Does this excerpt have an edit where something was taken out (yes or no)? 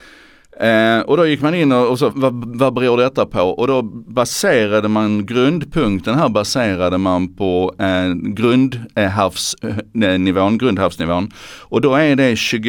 yes